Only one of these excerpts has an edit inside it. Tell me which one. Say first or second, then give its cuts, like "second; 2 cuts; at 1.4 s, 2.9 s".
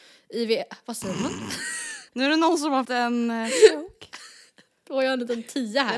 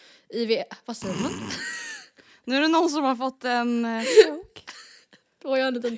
first; 2 cuts; at 2.1 s, 2.8 s